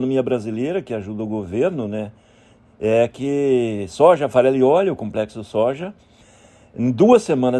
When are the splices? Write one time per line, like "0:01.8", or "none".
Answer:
none